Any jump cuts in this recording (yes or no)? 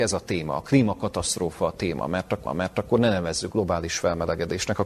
yes